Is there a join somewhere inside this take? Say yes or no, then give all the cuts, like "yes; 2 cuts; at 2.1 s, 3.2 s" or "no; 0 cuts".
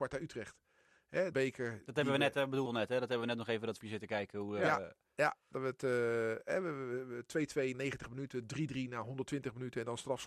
yes; 5 cuts; at 1.3 s, 2.7 s, 3.8 s, 5.5 s, 7.7 s